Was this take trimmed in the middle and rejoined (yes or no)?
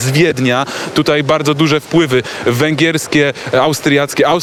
no